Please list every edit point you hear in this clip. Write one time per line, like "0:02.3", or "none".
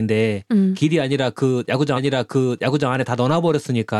0:02.0